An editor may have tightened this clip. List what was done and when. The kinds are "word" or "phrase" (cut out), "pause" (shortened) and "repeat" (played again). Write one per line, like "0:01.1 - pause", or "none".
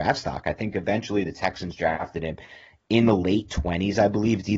none